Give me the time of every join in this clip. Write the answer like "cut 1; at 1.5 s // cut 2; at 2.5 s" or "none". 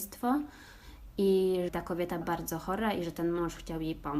cut 1; at 1.7 s // cut 2; at 2.2 s